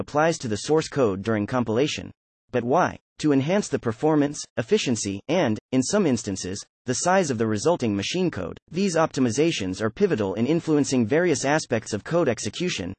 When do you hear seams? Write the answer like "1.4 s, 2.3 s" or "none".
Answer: 2.3 s, 8.6 s